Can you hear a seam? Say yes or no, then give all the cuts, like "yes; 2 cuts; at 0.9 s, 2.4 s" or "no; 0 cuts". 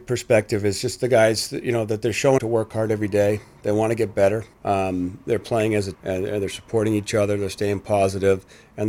yes; 3 cuts; at 2.4 s, 4.5 s, 5.9 s